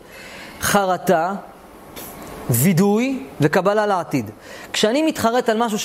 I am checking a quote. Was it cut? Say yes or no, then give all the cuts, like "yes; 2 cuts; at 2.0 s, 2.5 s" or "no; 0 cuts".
no; 0 cuts